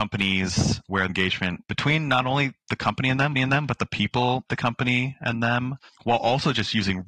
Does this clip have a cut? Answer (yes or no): yes